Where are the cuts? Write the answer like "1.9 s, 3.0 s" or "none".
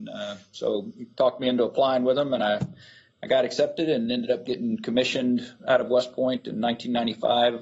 none